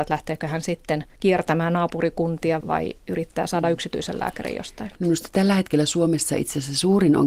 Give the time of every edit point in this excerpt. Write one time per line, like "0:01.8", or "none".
0:01.2
0:02.6
0:05.0